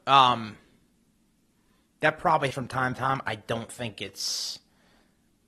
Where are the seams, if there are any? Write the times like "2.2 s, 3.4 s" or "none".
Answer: 2.5 s